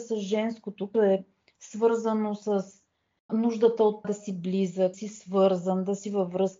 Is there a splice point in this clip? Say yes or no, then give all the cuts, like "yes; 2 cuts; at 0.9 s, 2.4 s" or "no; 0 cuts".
yes; 4 cuts; at 0.9 s, 3.3 s, 4.0 s, 4.9 s